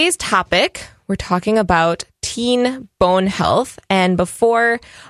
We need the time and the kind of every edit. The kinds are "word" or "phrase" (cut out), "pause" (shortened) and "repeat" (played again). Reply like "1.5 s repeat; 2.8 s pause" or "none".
none